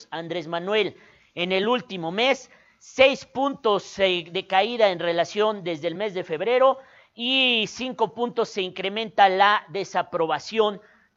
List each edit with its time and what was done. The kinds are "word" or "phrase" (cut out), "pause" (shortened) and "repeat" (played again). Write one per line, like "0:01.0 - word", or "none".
none